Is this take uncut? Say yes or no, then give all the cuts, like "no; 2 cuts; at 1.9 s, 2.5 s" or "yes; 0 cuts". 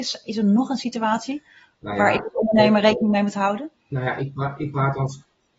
yes; 0 cuts